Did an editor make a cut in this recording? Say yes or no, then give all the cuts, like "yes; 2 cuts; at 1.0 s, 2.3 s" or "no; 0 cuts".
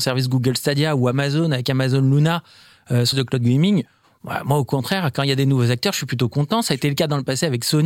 yes; 1 cut; at 3.1 s